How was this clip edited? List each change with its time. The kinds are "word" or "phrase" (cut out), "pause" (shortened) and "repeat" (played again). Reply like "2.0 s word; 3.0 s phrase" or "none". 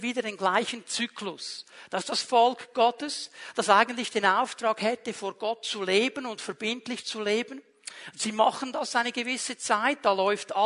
none